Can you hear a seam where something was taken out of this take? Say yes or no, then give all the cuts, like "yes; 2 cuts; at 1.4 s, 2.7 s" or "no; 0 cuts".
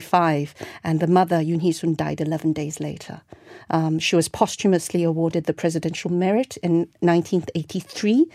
no; 0 cuts